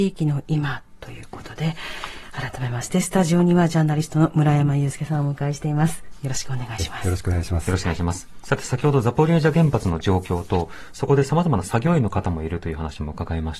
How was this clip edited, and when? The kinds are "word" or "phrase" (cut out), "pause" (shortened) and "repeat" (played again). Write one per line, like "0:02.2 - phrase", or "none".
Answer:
none